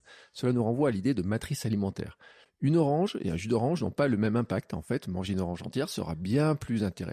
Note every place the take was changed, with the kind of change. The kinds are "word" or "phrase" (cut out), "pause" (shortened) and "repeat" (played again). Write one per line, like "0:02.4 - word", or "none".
none